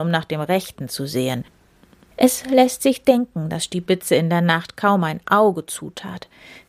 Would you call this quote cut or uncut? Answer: uncut